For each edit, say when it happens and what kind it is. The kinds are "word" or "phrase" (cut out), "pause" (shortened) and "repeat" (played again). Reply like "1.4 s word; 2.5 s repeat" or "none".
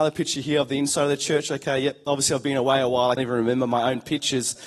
3.2 s word